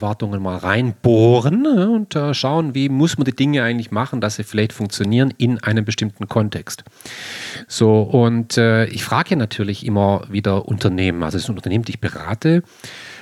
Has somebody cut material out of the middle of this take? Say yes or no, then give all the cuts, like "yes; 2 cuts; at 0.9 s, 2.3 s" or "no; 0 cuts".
no; 0 cuts